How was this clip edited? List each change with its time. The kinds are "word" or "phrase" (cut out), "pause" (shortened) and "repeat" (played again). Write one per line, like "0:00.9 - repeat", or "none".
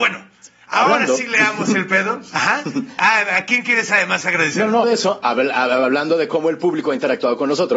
0:04.8 - word